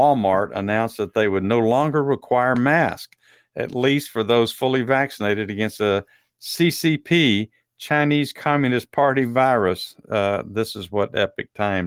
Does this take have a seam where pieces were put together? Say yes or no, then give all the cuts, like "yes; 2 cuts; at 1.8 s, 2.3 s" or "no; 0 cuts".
no; 0 cuts